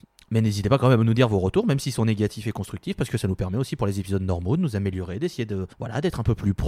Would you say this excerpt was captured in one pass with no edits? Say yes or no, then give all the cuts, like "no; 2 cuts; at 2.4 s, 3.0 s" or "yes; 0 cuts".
no; 1 cut; at 5.7 s